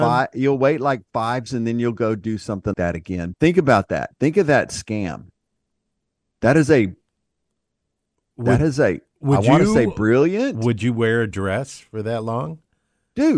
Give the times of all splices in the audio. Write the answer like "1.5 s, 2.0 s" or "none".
1.5 s, 2.7 s, 3.3 s, 4.2 s